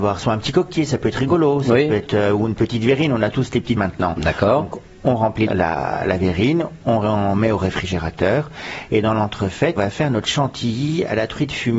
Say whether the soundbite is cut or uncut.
cut